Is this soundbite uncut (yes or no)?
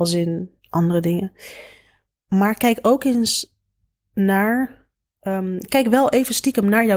yes